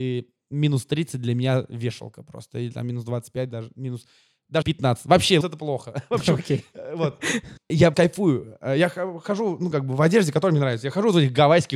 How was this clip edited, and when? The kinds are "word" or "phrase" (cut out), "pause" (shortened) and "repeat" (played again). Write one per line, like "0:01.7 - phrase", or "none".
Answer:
0:04.6 - word
0:05.4 - word
0:07.9 - word

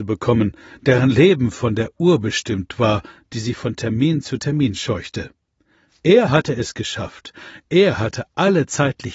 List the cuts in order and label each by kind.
none

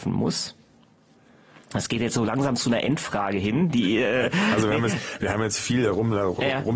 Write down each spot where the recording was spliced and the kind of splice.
none

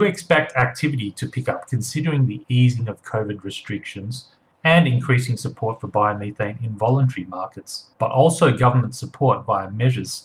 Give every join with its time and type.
0:07.9 - pause

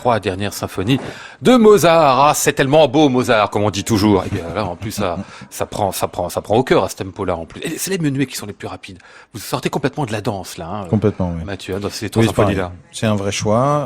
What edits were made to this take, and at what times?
none

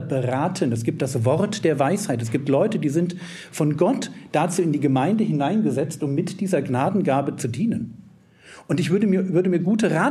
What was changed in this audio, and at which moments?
none

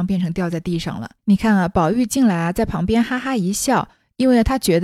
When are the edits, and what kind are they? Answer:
0:01.2 - pause

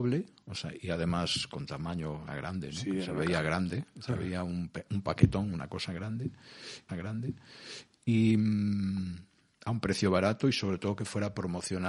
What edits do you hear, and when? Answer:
0:02.3 - phrase
0:06.9 - repeat

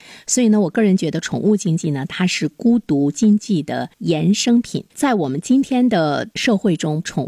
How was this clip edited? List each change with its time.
0:03.9 - pause
0:04.9 - pause
0:06.3 - pause

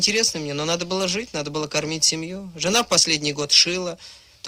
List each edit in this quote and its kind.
none

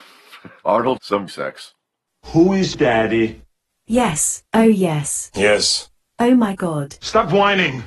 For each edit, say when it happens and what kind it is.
0:01.0 - phrase
0:01.3 - phrase
0:02.7 - word
0:04.5 - pause

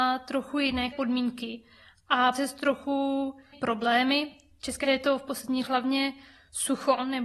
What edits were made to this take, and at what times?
0:00.9 - word
0:02.3 - word
0:03.5 - word
0:04.8 - word
0:05.7 - word

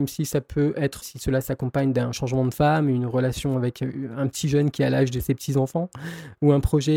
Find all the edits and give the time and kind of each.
0:01.0 - word

